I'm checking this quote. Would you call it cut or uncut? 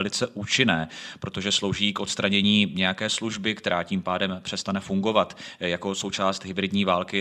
uncut